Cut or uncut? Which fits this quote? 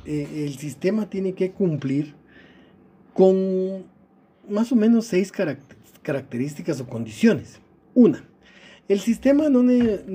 uncut